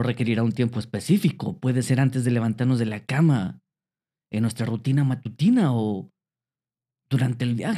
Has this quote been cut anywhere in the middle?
no; 0 cuts

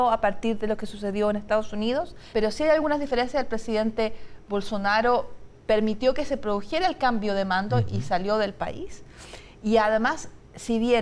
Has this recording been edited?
yes; 1 cut; at 2.3 s

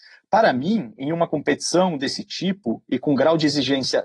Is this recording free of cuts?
yes; 0 cuts

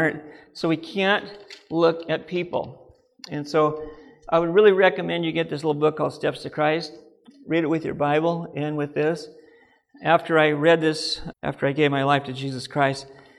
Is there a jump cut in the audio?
yes; 1 cut; at 11.3 s

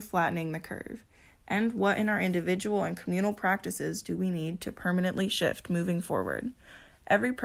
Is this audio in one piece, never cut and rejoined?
yes; 0 cuts

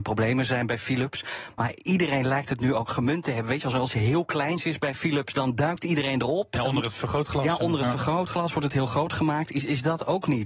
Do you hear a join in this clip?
no; 0 cuts

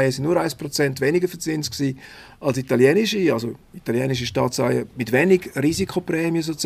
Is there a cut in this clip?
yes; 1 cut; at 4.9 s

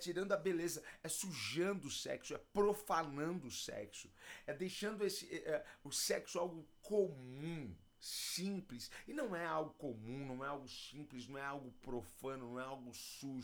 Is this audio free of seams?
no; 1 cut; at 7.9 s

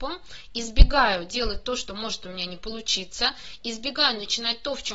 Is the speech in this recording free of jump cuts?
yes; 0 cuts

